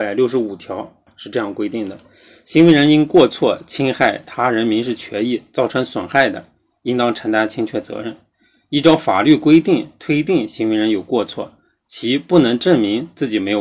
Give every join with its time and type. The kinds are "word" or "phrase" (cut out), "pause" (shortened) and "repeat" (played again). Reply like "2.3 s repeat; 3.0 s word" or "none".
none